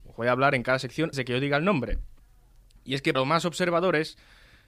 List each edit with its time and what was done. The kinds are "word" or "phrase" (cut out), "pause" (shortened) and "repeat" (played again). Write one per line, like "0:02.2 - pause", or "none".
0:01.1 - word
0:03.1 - word

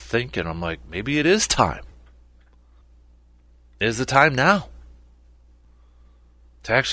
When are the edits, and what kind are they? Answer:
none

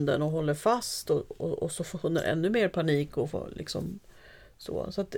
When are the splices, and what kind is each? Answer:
none

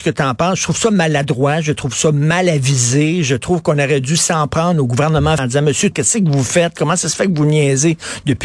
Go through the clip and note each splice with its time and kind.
0:05.4 - word
0:05.9 - word

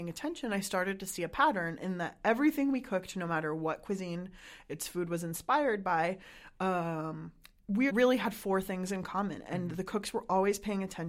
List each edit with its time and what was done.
0:07.9 - word

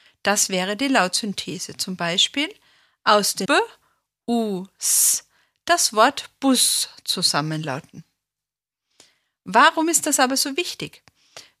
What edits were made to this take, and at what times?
0:03.4 - word

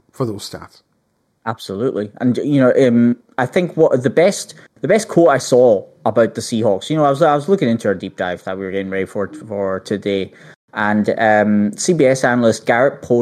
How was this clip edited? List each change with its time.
none

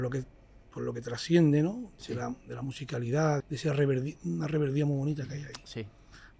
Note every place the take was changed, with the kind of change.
0:03.4 - word

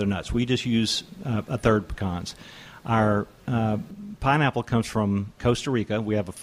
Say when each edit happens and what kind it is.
0:05.4 - word

